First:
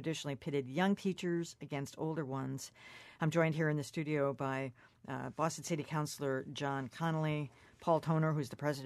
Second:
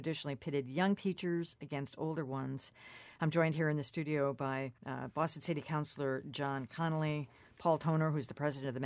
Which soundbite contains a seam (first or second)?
second